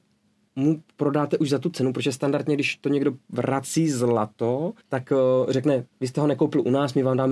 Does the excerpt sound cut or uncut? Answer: cut